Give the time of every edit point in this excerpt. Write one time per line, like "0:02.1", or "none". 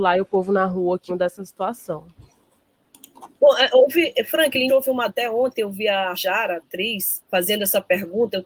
0:01.1
0:04.7
0:05.1
0:06.1
0:07.2